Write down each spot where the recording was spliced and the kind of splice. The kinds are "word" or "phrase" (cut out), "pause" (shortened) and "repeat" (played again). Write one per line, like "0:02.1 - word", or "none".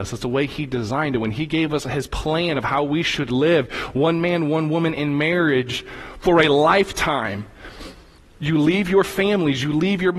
none